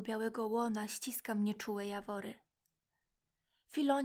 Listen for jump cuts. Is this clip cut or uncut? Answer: uncut